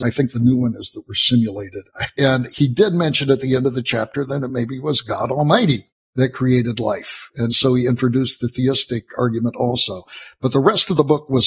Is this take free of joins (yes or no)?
yes